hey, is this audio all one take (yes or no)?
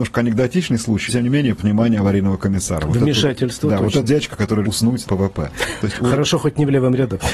no